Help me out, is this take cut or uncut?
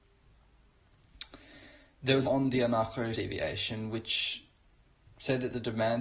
cut